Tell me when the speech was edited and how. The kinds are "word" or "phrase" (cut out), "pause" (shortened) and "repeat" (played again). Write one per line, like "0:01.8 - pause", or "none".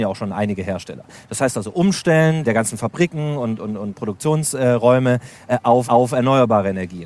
0:05.9 - repeat

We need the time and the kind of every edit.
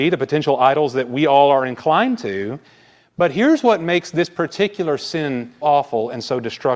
0:05.6 - word

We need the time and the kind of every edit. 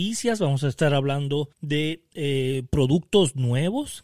0:01.5 - pause

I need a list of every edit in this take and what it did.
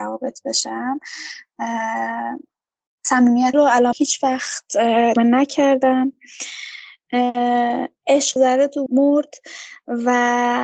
0:03.5 - word
0:03.9 - word
0:05.2 - word
0:08.4 - word
0:08.9 - word

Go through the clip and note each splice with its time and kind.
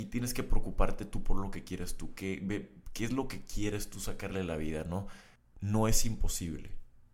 none

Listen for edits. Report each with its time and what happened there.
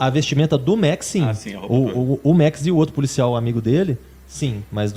none

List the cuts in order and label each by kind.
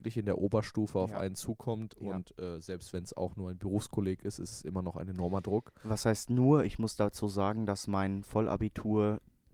none

